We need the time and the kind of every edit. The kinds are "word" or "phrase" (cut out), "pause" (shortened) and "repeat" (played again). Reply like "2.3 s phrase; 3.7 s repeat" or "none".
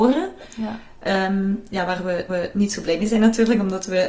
2.3 s repeat